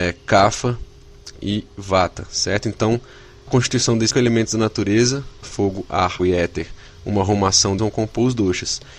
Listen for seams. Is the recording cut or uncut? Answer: cut